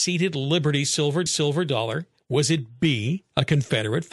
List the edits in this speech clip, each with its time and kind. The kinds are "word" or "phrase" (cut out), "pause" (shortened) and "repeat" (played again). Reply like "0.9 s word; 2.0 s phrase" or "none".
1.3 s repeat

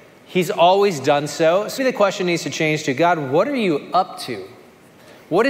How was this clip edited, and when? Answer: 1.8 s word

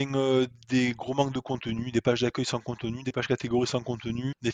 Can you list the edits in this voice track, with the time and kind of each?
none

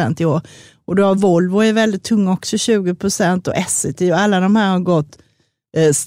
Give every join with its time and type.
none

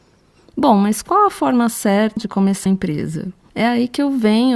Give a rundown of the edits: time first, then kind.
2.2 s word; 2.7 s word

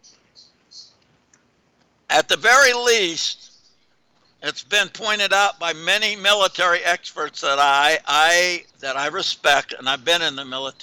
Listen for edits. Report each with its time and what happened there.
8.7 s pause

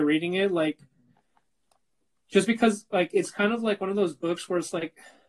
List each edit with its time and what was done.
none

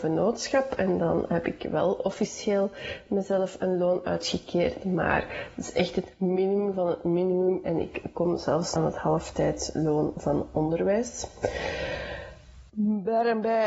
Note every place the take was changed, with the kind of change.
8.8 s phrase; 12.7 s pause

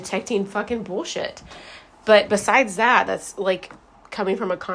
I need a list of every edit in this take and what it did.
none

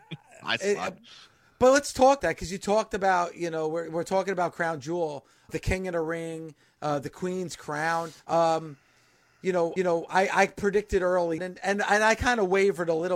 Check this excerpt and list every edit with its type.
2.2 s word; 5.5 s word; 8.2 s pause; 9.8 s repeat; 11.4 s word

